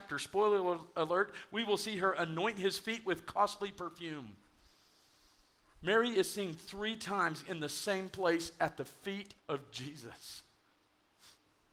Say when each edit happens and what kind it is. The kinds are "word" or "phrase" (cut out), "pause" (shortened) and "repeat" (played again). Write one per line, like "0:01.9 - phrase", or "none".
0:09.4 - pause